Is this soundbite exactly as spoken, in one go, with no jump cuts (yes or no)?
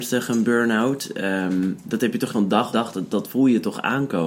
no